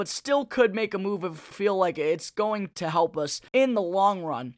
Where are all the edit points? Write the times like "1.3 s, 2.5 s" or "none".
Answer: 1.5 s, 3.5 s

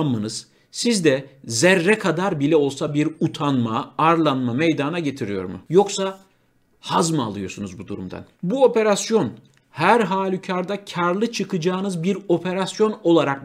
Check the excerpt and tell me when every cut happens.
none

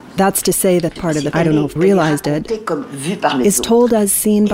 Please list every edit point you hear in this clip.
1.0 s, 1.3 s, 1.8 s

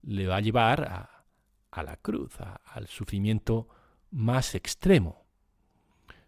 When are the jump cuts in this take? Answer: none

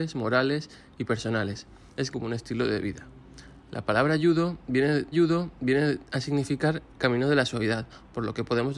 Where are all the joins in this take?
2.1 s, 5.1 s

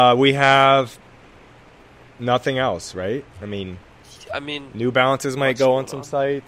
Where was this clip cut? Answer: none

